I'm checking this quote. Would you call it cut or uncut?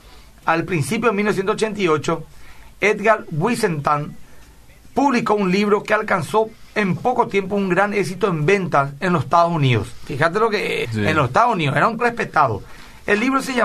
cut